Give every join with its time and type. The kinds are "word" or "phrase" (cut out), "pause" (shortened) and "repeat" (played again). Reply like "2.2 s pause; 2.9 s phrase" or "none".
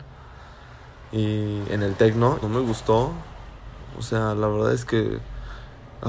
2.4 s phrase